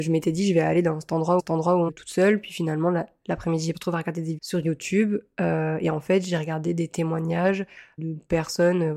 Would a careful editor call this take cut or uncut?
cut